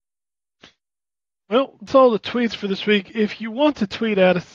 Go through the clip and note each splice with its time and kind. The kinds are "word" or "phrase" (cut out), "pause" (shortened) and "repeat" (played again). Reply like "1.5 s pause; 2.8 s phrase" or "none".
1.9 s word